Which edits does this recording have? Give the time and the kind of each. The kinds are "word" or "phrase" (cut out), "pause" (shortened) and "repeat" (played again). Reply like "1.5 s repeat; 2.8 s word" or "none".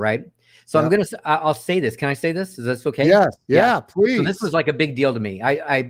3.4 s pause